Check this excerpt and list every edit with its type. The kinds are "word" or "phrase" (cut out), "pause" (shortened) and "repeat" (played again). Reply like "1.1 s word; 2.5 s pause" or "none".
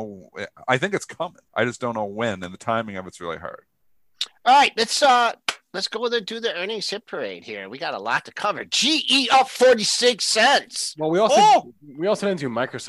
1.5 s pause